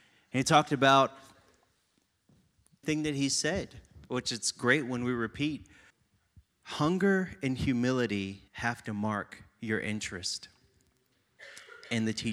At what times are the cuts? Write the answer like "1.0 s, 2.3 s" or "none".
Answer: 2.8 s, 5.9 s, 8.5 s